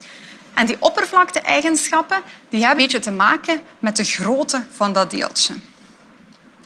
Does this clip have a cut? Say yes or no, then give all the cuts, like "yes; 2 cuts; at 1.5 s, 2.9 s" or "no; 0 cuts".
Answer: yes; 1 cut; at 2.8 s